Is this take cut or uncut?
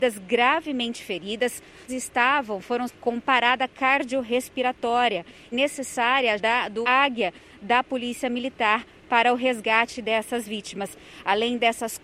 cut